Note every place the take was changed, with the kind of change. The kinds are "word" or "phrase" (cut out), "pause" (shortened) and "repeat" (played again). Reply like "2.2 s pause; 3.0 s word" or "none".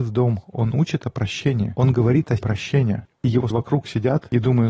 2.4 s word; 3.5 s word